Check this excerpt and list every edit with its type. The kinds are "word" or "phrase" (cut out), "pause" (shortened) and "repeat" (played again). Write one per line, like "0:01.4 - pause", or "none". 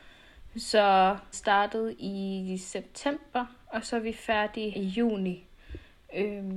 0:01.3 - word
0:04.7 - word

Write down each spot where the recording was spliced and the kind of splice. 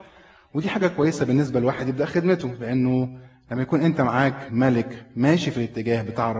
none

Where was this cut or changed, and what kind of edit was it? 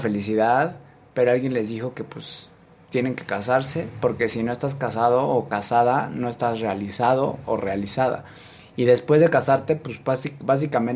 none

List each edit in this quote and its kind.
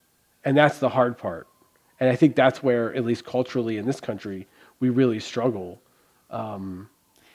none

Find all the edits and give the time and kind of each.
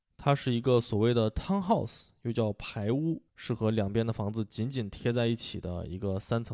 0:03.3 - pause

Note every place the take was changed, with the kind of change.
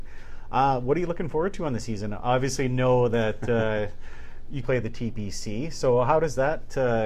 0:04.6 - word

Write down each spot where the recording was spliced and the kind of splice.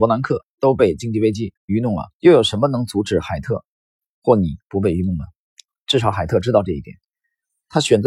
0:01.6 - pause
0:02.1 - pause

